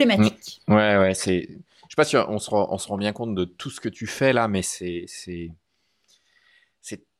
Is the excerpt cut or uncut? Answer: uncut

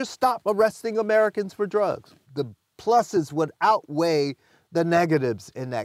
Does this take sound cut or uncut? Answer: cut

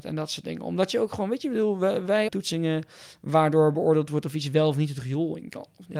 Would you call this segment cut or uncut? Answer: cut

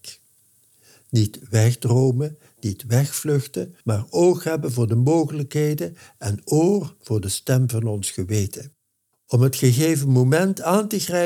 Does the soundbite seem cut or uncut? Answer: cut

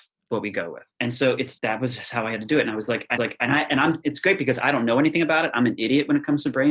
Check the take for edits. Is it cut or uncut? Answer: cut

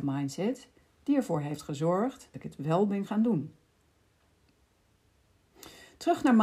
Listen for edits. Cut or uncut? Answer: cut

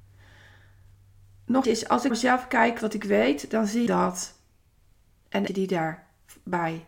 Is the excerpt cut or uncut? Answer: cut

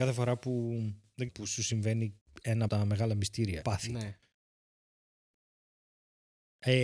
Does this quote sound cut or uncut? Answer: cut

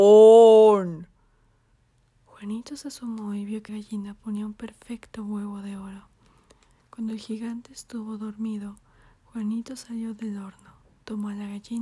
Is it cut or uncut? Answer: cut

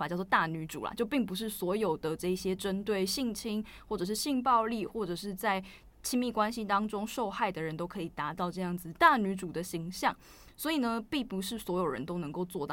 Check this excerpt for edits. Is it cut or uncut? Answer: uncut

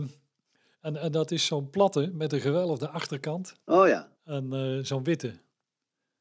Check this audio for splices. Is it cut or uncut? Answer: cut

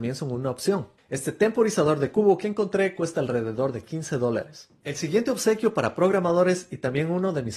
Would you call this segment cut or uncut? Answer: uncut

